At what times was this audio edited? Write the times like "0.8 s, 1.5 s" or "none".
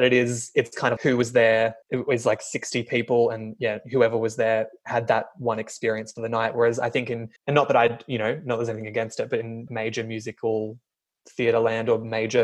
1.0 s, 1.8 s, 7.4 s, 9.7 s